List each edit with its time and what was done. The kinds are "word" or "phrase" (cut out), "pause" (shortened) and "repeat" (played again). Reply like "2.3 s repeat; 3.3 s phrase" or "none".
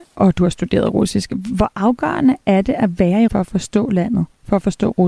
3.3 s word